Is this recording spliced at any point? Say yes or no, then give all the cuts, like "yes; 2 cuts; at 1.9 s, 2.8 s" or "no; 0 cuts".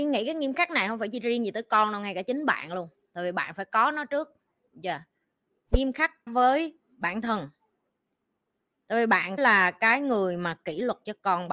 yes; 2 cuts; at 6.3 s, 9.4 s